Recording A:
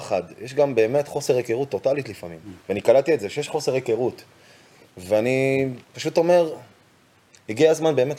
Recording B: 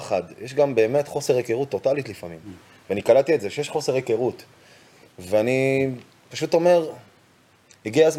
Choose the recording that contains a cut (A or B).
A